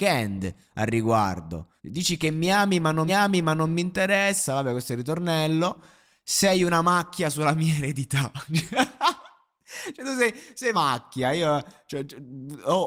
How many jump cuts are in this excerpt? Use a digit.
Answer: 3